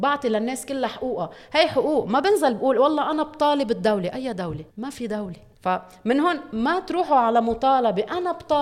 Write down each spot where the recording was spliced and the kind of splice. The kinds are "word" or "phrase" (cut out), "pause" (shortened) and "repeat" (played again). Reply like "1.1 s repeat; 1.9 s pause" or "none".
4.7 s pause; 5.5 s pause